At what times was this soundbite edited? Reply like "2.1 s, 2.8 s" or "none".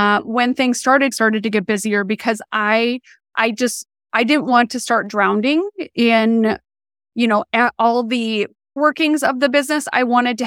1.1 s, 8.8 s